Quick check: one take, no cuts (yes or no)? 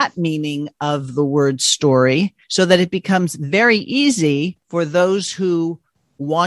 no